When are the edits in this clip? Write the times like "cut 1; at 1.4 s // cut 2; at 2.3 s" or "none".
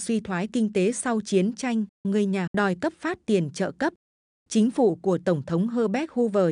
cut 1; at 2.0 s // cut 2; at 2.5 s